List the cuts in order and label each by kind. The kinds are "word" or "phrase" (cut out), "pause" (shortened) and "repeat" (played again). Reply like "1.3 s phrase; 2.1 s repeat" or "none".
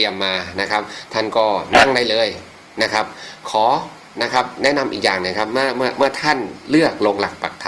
none